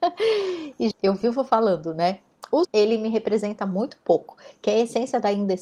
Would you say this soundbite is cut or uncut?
cut